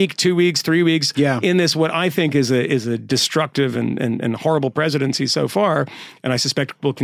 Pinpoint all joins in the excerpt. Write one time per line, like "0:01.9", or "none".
none